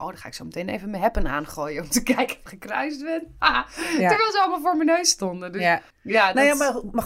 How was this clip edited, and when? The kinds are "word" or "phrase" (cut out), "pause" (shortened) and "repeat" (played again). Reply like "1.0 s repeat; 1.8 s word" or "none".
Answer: 2.5 s phrase; 5.9 s pause

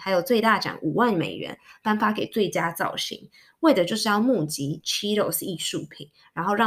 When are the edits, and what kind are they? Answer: none

